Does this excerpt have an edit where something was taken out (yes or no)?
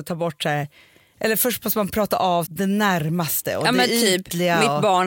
yes